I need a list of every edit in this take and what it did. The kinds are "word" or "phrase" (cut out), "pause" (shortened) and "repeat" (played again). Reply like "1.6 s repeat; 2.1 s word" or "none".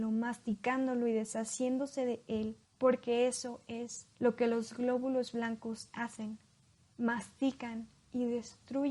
2.6 s pause; 4.1 s pause